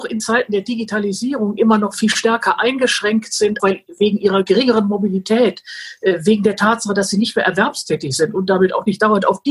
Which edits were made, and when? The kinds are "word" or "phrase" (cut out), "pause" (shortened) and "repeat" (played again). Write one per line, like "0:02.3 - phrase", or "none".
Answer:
0:03.6 - word